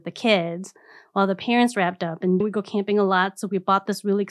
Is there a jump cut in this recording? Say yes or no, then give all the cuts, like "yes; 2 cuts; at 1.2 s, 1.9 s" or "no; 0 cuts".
yes; 1 cut; at 2.4 s